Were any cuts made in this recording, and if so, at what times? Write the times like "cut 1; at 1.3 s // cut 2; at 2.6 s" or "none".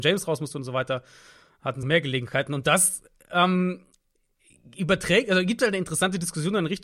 cut 1; at 1.8 s